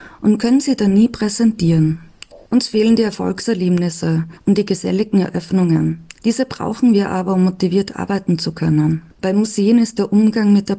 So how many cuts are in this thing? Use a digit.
4